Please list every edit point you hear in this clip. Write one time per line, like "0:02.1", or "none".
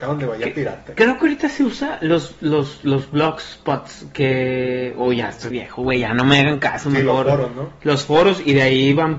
0:05.5